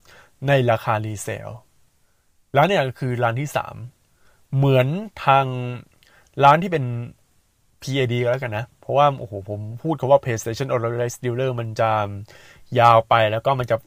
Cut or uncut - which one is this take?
uncut